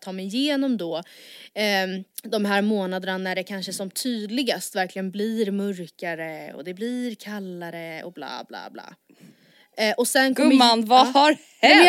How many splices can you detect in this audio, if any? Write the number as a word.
one